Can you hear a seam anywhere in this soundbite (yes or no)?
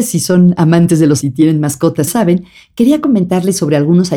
yes